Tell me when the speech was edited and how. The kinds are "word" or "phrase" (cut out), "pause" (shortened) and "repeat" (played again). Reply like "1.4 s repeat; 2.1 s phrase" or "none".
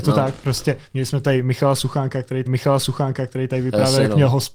2.5 s repeat